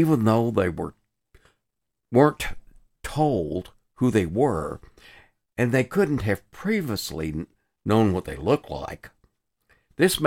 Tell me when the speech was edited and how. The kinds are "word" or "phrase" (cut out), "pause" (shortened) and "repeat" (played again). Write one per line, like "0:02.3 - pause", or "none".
none